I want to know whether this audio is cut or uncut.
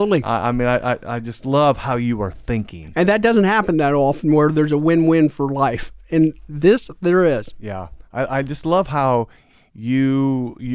uncut